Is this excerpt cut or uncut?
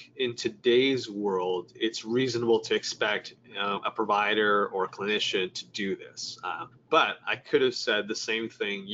cut